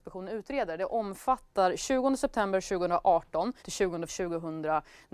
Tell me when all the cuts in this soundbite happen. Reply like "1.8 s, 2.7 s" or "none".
3.6 s, 4.1 s